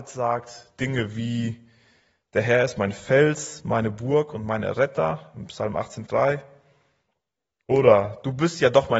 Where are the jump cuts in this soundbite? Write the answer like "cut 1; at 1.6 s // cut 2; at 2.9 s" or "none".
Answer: cut 1; at 6.1 s